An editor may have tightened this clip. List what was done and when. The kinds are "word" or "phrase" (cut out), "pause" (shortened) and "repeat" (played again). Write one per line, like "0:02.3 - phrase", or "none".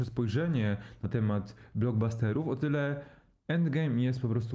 none